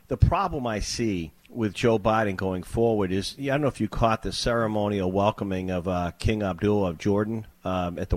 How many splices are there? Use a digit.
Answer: 1